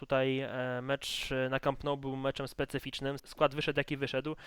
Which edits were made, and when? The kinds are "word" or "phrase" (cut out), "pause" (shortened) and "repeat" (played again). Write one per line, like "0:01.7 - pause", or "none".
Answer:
0:03.2 - word